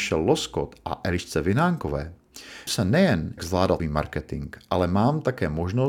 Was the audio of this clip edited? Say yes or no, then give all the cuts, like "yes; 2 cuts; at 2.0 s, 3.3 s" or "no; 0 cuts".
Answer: yes; 3 cuts; at 2.7 s, 3.4 s, 3.8 s